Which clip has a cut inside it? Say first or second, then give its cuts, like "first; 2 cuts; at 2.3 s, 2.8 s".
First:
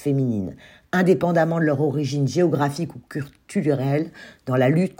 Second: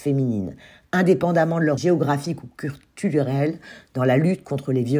second; 1 cut; at 1.8 s